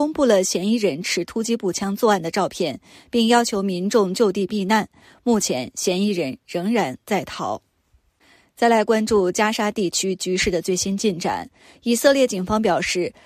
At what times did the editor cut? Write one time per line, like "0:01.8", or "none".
none